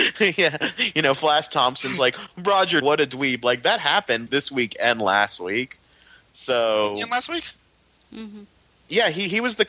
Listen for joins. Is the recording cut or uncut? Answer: cut